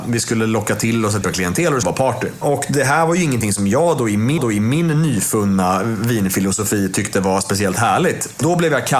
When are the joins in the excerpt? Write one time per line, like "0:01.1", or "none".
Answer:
0:01.2
0:01.8
0:04.4